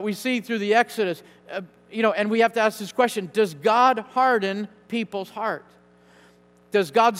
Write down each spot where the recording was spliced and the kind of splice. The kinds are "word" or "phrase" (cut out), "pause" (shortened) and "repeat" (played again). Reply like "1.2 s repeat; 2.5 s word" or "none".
none

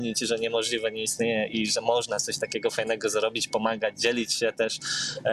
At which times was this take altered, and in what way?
none

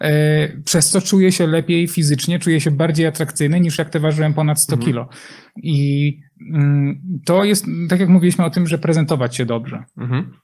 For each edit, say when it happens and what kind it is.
none

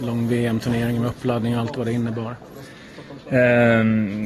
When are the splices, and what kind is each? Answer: none

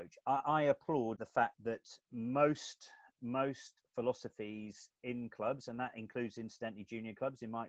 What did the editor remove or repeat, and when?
1.1 s phrase; 2.0 s pause

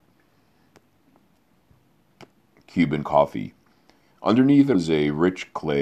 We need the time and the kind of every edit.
4.7 s word

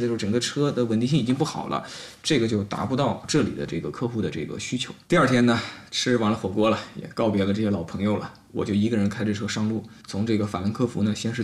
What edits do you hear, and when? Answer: 5.0 s pause

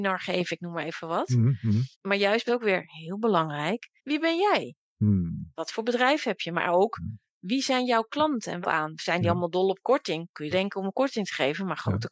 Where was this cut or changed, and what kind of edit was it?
1.9 s pause; 2.5 s phrase; 4.0 s pause; 8.6 s phrase; 10.5 s word

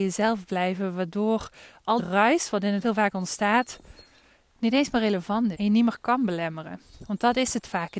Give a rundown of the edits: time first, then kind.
2.0 s word; 2.8 s word; 5.5 s word

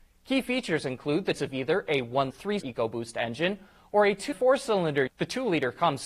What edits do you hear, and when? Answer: 1.4 s word; 2.3 s word; 2.6 s word; 4.3 s word; 5.1 s word

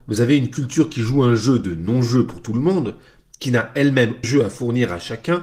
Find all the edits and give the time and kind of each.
4.2 s word

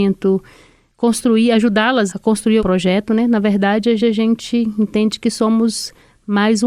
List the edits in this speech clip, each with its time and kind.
2.1 s word; 2.6 s word; 4.0 s repeat

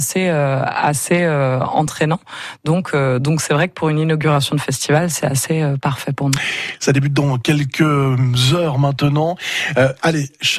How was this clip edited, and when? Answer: none

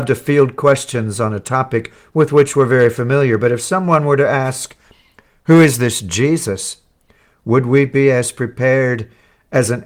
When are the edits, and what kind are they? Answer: none

